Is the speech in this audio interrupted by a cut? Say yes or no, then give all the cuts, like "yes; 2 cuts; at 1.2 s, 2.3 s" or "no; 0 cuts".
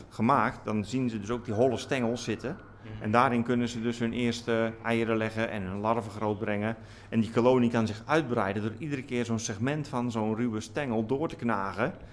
no; 0 cuts